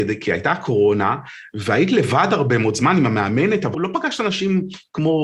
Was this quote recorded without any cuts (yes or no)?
no